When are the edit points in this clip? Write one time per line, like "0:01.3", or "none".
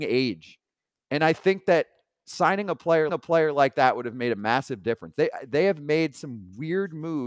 0:03.1